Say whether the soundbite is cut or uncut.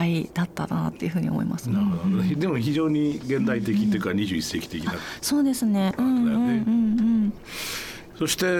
uncut